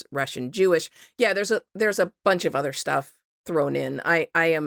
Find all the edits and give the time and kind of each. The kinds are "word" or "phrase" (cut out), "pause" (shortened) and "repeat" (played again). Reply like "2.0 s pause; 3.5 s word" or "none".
none